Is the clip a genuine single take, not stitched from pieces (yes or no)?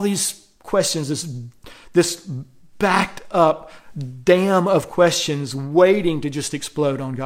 yes